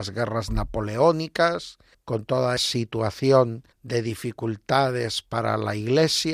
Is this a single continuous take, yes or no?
no